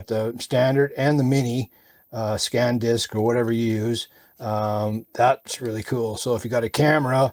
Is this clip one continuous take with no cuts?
yes; 0 cuts

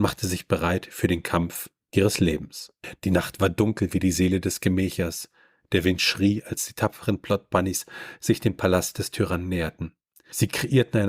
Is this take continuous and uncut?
yes; 0 cuts

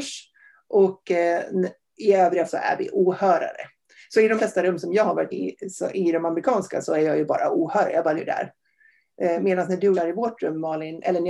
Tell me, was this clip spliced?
yes; 5 cuts; at 2.5 s, 4.4 s, 5.3 s, 8.2 s, 9.9 s

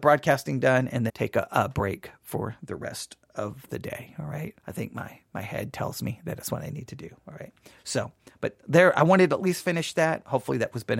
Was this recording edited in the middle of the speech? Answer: yes; 2 cuts; at 1.1 s, 4.6 s

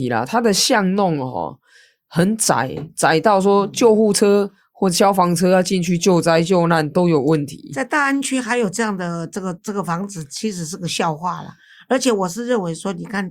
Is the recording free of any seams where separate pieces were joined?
yes; 0 cuts

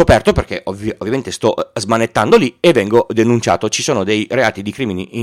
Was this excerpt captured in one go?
yes; 0 cuts

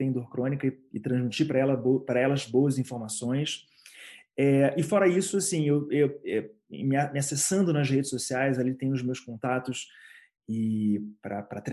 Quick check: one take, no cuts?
yes; 0 cuts

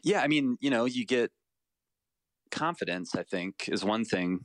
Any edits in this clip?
no; 0 cuts

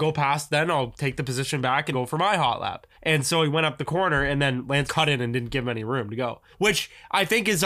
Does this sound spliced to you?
yes; 4 cuts; at 1.9 s, 2.9 s, 4.9 s, 6.5 s

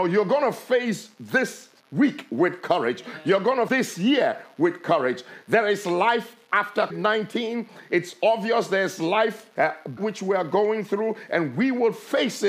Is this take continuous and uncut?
no; 5 cuts; at 1.8 s, 3.7 s, 6.9 s, 9.5 s, 10.0 s

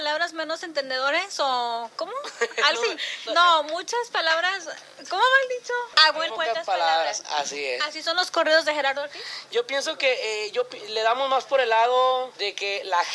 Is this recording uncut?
no; 3 cuts; at 2.7 s, 3.3 s, 6.3 s

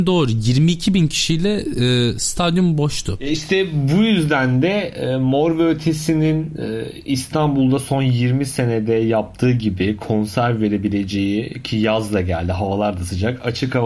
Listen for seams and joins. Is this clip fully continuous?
yes; 0 cuts

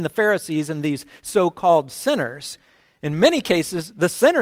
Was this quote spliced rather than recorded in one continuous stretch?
no; 0 cuts

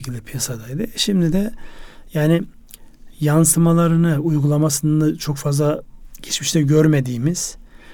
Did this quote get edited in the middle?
no; 0 cuts

